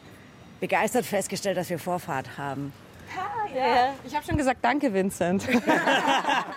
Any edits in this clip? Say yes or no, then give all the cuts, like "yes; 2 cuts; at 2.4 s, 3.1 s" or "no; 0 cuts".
no; 0 cuts